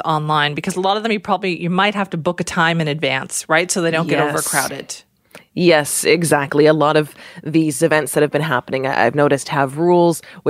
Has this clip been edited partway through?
no; 0 cuts

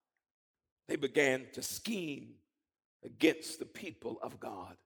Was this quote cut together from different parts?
no; 0 cuts

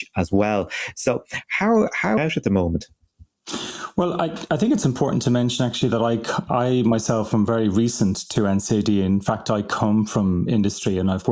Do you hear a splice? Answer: yes; 1 cut; at 2.2 s

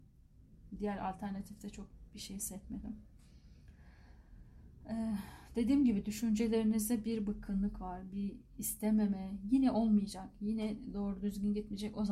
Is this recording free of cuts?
yes; 0 cuts

